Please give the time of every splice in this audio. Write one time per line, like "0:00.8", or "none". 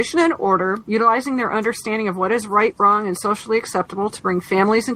none